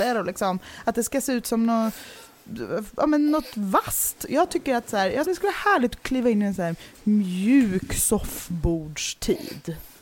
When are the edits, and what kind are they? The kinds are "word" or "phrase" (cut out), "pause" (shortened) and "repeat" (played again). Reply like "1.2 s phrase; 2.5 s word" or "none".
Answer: 5.2 s word